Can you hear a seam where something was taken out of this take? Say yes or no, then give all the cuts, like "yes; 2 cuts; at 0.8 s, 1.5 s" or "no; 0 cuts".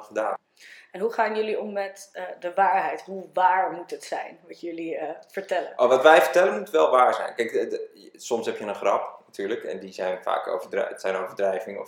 no; 0 cuts